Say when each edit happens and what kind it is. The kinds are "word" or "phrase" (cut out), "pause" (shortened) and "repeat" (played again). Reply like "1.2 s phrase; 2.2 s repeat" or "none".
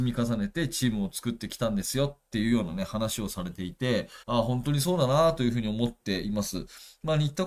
4.2 s pause